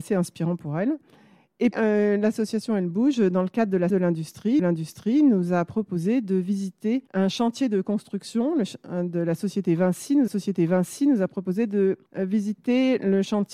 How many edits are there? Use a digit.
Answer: 6